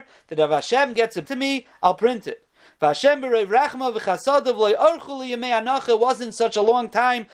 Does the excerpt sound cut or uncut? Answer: cut